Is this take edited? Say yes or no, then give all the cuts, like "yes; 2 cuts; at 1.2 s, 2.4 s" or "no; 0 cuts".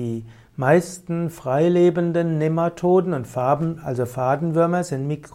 no; 0 cuts